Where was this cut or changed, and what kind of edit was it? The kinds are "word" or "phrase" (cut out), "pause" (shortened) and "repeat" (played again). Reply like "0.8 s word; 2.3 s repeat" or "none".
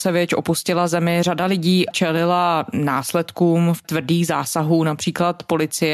1.9 s word; 3.8 s word